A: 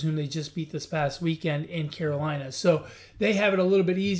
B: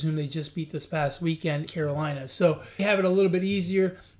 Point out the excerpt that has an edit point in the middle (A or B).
B